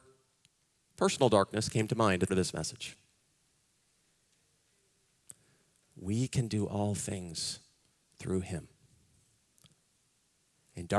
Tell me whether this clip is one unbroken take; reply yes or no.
no